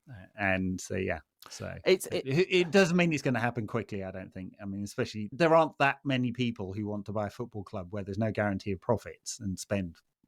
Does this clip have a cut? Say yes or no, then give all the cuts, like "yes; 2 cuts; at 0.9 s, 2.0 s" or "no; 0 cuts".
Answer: yes; 1 cut; at 5.3 s